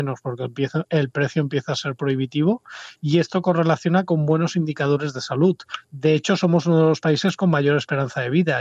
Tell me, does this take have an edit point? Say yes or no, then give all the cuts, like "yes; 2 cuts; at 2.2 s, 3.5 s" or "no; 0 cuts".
yes; 1 cut; at 5.8 s